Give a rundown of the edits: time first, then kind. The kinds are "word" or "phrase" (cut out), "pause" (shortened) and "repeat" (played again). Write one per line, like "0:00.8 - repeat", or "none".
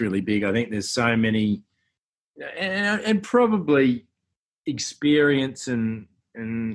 none